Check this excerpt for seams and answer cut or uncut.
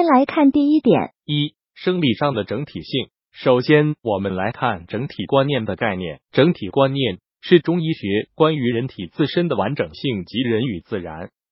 uncut